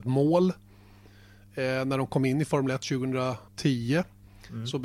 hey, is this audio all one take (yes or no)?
no